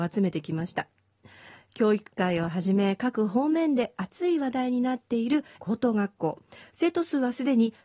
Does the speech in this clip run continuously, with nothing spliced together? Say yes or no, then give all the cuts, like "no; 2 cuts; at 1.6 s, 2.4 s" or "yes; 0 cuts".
no; 1 cut; at 5.6 s